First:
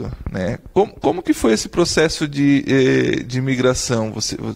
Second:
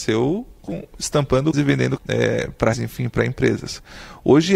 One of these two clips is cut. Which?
second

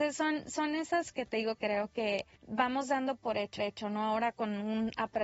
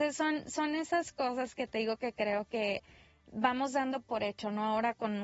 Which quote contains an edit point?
first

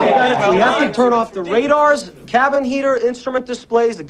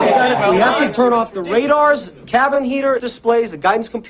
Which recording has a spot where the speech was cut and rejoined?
second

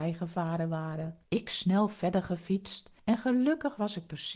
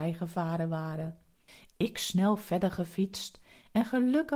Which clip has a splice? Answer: first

